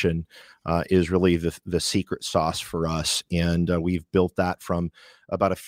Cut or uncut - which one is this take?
uncut